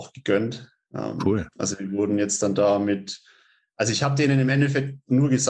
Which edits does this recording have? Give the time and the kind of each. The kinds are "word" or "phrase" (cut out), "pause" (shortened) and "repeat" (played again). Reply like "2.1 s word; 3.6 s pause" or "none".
none